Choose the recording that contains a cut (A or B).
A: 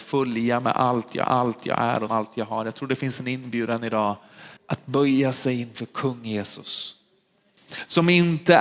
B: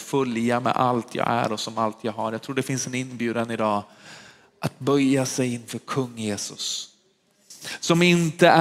A